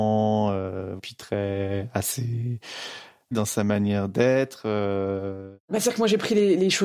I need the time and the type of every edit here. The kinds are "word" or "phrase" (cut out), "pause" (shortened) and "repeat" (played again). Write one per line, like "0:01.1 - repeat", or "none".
0:03.3 - phrase